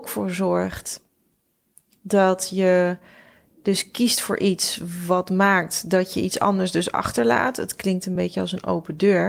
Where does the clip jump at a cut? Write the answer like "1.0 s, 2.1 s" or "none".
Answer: none